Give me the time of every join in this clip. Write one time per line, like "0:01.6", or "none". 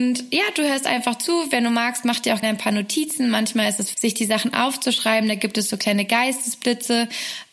0:02.4
0:03.9